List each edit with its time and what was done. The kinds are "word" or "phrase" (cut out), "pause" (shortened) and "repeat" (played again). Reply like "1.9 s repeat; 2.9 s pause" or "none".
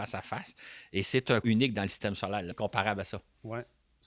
1.4 s word; 2.5 s phrase